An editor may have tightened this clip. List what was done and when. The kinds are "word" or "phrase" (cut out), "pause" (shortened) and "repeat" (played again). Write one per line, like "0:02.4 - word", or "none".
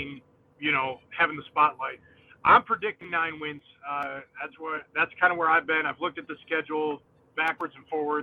none